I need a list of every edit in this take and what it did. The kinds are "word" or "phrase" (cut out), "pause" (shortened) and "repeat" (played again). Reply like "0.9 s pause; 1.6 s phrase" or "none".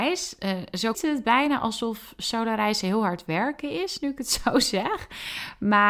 0.9 s word